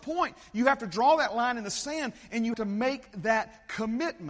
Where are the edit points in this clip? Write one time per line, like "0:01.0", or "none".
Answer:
0:02.5

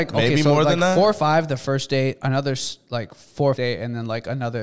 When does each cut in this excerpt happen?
0:03.6

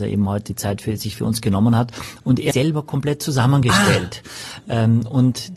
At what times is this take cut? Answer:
0:02.5

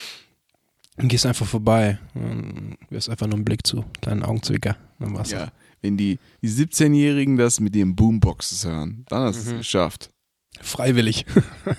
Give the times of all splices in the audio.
0:02.8

